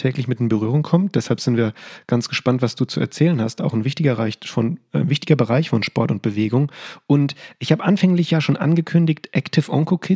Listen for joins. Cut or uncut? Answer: uncut